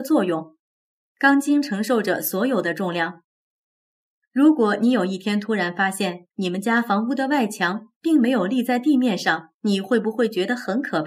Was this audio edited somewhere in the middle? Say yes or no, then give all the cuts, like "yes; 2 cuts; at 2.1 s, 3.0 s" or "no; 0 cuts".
yes; 2 cuts; at 6.3 s, 9.5 s